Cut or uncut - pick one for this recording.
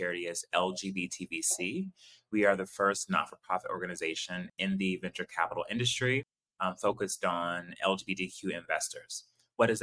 uncut